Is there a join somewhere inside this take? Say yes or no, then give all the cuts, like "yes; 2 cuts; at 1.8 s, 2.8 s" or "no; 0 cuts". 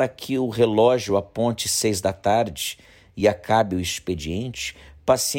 no; 0 cuts